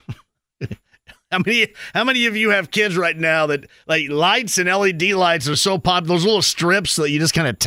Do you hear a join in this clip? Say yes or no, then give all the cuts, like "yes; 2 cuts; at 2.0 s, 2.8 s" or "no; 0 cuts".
no; 0 cuts